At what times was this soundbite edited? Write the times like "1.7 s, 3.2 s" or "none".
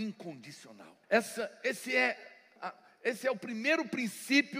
1.0 s, 2.6 s